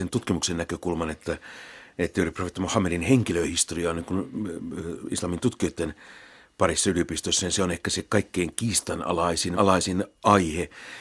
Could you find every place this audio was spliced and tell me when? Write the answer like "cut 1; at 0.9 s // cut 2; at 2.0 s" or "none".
cut 1; at 9.6 s

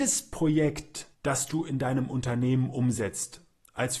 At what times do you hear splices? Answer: cut 1; at 1.1 s

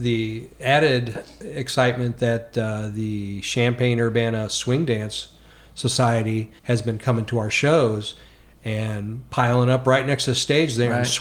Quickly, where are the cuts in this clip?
cut 1; at 6.6 s

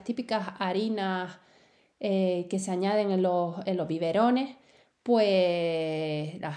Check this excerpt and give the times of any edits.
none

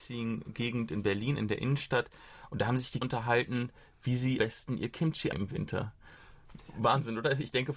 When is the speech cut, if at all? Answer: cut 1; at 3.0 s // cut 2; at 4.4 s // cut 3; at 5.3 s

